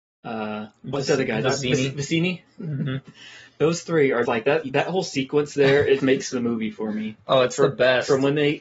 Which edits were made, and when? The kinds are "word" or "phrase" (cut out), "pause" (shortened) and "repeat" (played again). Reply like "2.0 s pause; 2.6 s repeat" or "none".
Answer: 4.2 s word; 6.0 s word